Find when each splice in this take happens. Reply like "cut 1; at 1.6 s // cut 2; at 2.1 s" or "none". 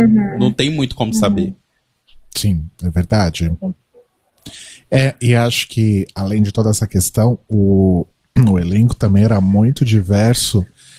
cut 1; at 2.7 s